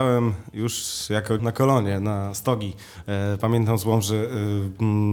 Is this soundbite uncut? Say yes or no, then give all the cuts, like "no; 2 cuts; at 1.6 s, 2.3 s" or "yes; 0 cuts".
no; 1 cut; at 1.4 s